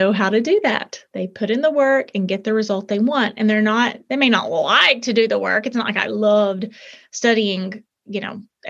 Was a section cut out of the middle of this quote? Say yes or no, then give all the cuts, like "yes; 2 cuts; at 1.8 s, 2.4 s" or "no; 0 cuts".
no; 0 cuts